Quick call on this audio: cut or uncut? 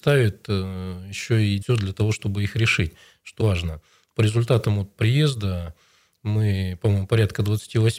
cut